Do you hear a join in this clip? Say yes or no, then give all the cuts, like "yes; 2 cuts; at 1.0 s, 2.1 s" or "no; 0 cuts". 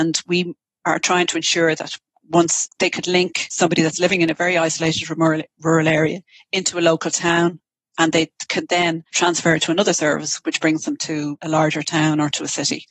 no; 0 cuts